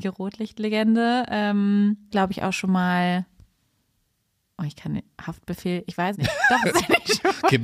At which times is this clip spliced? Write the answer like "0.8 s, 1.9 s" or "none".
2.1 s, 5.1 s, 6.1 s, 6.7 s